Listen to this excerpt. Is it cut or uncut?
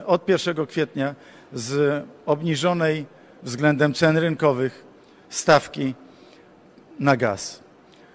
uncut